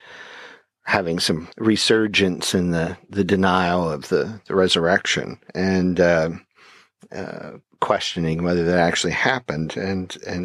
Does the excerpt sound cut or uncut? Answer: cut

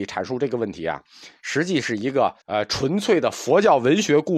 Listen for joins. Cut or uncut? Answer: cut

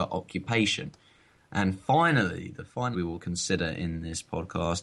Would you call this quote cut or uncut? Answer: cut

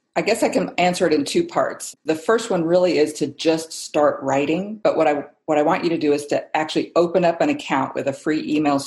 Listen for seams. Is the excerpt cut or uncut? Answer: uncut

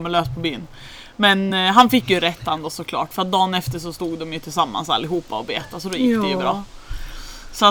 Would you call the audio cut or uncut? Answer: uncut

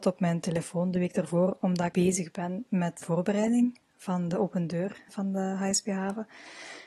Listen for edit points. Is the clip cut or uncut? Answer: cut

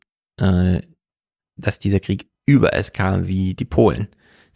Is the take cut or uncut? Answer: uncut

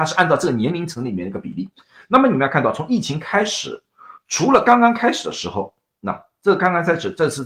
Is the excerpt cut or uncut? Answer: uncut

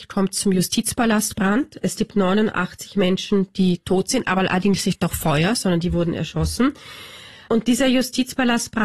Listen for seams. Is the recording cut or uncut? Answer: uncut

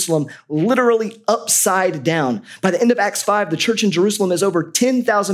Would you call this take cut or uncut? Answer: uncut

